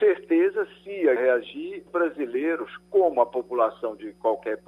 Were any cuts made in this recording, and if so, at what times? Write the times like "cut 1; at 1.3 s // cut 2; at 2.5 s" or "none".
cut 1; at 1.2 s // cut 2; at 1.9 s

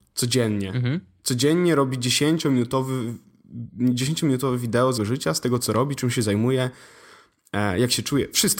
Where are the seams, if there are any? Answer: cut 1; at 5.0 s

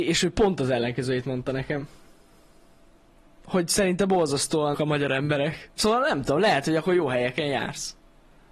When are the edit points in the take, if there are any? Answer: cut 1; at 4.7 s

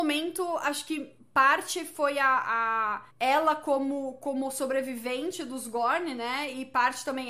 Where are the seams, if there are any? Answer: cut 1; at 3.1 s

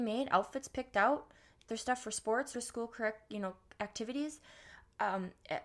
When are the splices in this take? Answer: cut 1; at 1.7 s // cut 2; at 2.5 s

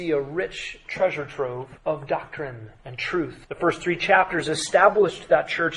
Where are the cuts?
cut 1; at 1.8 s // cut 2; at 2.8 s // cut 3; at 3.4 s

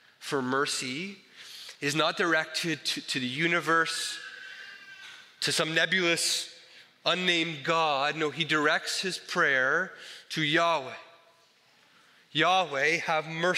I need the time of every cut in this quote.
none

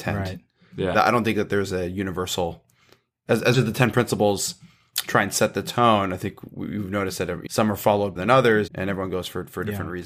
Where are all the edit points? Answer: cut 1; at 0.9 s // cut 2; at 3.5 s // cut 3; at 7.5 s // cut 4; at 8.2 s // cut 5; at 8.7 s

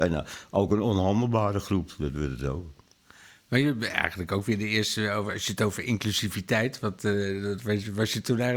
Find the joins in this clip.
none

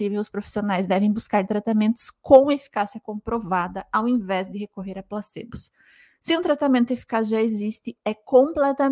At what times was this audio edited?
none

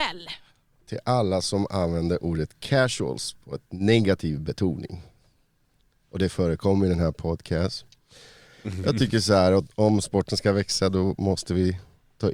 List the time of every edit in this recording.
none

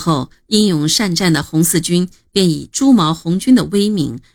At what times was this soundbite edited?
none

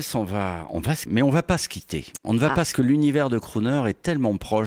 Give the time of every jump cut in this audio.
cut 1; at 1.1 s // cut 2; at 2.7 s

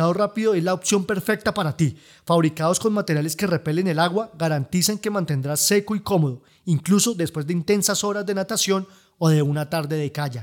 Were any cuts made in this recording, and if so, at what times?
none

